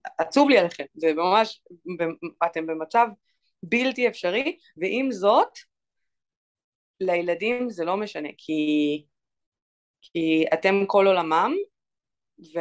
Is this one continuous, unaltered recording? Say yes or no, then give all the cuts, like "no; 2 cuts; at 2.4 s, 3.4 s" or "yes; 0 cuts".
yes; 0 cuts